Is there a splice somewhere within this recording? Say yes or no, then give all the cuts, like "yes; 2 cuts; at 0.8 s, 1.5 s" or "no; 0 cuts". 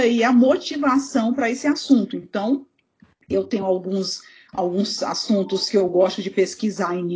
no; 0 cuts